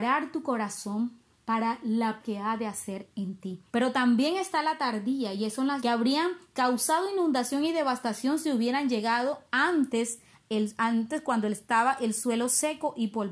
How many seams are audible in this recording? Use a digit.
3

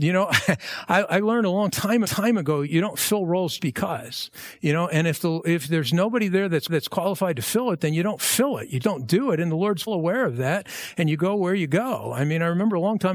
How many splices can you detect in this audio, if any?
5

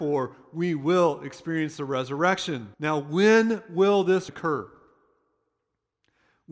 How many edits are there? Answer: 2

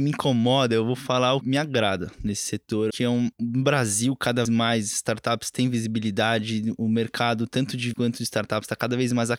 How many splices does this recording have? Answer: 5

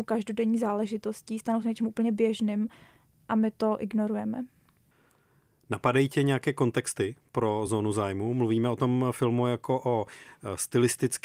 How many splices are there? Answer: 0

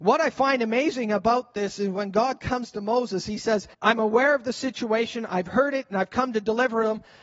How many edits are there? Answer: 1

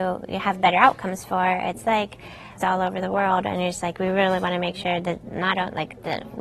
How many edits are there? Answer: 1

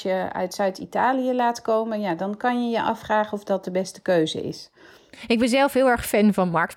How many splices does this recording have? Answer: 0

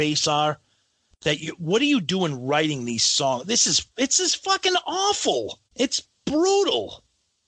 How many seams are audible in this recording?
2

